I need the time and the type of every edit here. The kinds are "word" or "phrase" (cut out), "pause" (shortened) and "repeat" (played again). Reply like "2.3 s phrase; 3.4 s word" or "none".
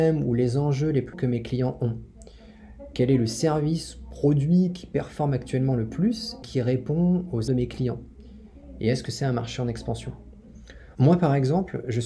1.1 s word; 6.4 s word; 7.5 s word